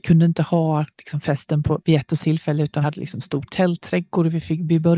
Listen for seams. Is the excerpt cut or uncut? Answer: cut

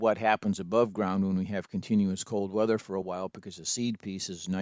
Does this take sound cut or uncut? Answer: uncut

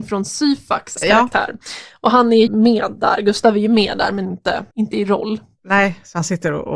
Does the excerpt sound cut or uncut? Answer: cut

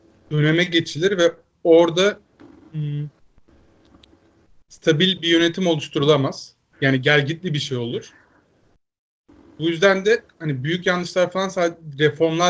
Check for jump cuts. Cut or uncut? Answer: uncut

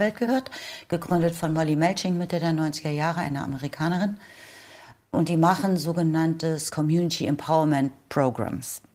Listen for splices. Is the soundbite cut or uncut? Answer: uncut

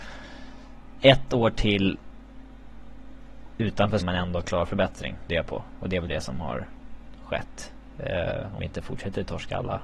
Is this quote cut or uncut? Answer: cut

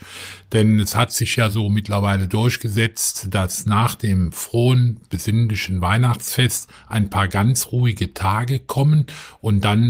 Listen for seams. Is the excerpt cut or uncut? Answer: uncut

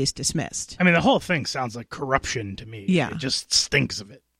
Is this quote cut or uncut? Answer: uncut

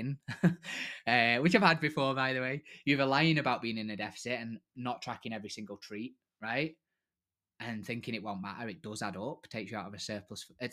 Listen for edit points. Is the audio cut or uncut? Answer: uncut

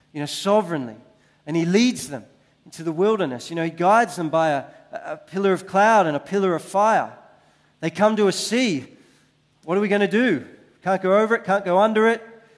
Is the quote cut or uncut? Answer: uncut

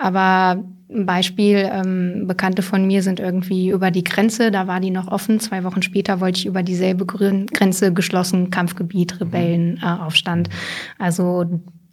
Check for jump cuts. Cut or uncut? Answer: uncut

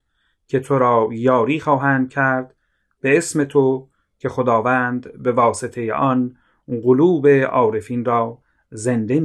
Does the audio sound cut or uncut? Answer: uncut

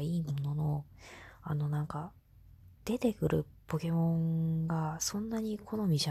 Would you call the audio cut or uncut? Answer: cut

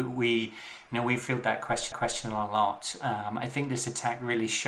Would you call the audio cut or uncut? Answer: cut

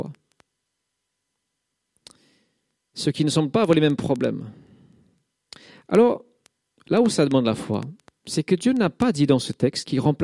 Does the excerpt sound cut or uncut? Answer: uncut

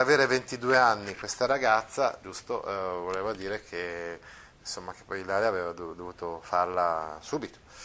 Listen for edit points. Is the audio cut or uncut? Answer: uncut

